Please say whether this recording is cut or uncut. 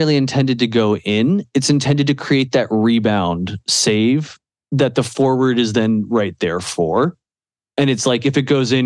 uncut